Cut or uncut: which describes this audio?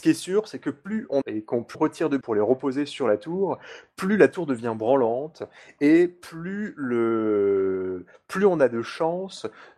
cut